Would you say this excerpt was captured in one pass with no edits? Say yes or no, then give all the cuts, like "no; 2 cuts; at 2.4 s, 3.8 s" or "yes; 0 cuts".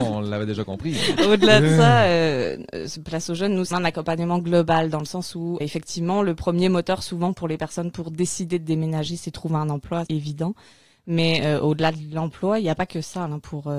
no; 3 cuts; at 3.7 s, 5.6 s, 10.1 s